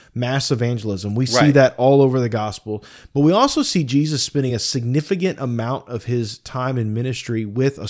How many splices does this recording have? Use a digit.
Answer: 0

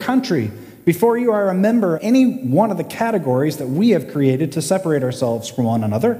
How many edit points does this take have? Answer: 1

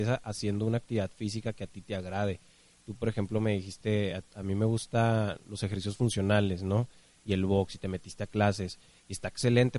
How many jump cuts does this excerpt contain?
0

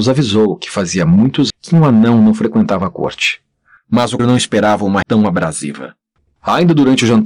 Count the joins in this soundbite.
3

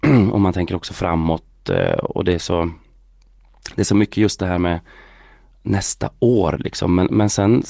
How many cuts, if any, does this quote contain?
0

